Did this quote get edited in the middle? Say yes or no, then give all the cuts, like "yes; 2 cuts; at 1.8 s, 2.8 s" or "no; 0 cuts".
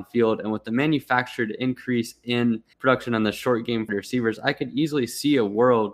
yes; 2 cuts; at 2.7 s, 3.9 s